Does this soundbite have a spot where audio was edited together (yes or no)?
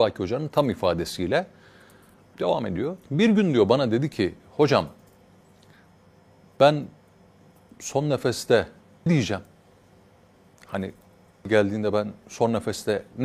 yes